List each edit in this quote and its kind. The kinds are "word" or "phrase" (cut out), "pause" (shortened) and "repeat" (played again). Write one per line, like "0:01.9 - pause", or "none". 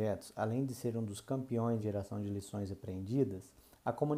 0:01.8 - word